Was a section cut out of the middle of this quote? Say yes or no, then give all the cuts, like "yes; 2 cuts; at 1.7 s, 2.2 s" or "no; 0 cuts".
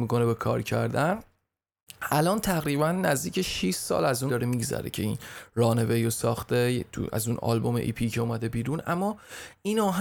yes; 1 cut; at 4.3 s